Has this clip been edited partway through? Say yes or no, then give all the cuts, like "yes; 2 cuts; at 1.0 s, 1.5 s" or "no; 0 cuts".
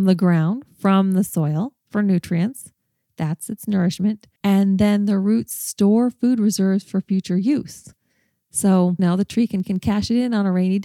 yes; 4 cuts; at 1.8 s, 4.4 s, 9.0 s, 9.6 s